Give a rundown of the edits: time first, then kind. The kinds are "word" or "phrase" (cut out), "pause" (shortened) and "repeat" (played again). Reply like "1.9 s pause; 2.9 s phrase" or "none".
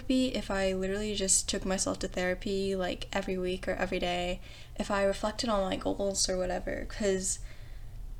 none